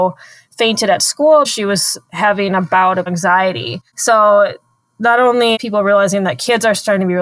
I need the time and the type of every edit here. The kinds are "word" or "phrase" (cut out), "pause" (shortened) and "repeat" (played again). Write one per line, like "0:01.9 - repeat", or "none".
0:01.4 - word
0:02.0 - pause
0:03.1 - word
0:03.9 - pause
0:05.5 - word